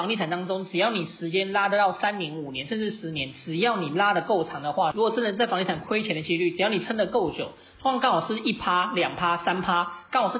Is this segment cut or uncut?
uncut